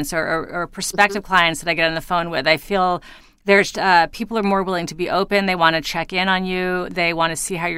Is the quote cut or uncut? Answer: cut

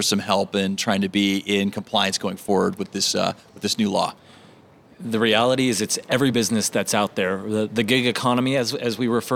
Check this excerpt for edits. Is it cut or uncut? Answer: uncut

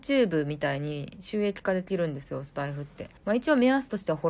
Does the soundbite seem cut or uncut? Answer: cut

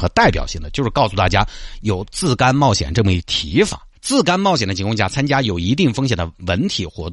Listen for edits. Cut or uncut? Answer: cut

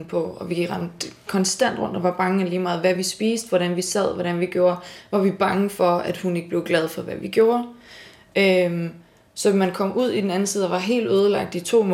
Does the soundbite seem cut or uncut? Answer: uncut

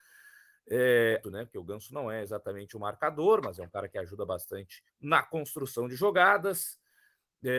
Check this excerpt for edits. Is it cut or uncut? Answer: cut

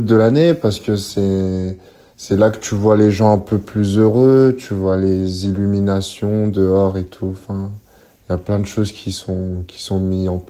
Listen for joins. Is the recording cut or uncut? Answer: uncut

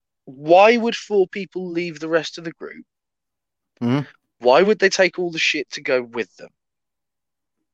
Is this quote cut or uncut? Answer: uncut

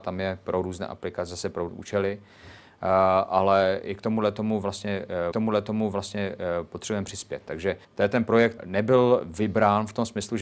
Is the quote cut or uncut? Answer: cut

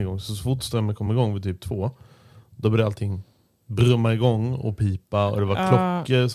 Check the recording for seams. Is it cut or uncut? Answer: uncut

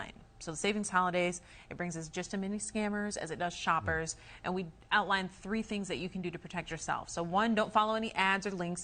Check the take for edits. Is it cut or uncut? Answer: uncut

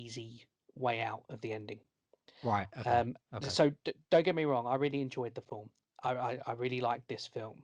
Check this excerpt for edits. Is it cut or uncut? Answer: uncut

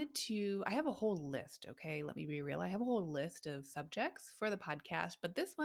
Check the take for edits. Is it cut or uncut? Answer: uncut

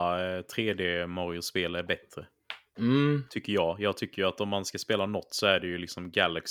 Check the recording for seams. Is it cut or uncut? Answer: uncut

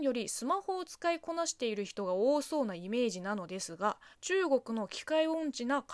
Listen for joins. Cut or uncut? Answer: cut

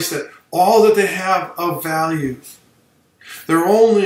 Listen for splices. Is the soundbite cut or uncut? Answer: uncut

